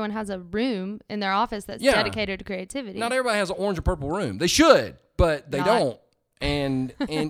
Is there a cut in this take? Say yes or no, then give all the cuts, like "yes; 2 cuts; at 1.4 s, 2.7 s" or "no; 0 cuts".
no; 0 cuts